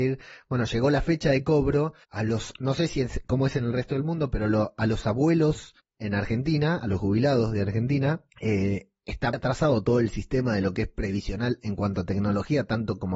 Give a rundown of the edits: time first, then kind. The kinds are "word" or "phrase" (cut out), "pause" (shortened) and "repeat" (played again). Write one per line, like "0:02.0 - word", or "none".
0:02.0 - pause
0:05.8 - pause
0:08.3 - pause
0:09.3 - word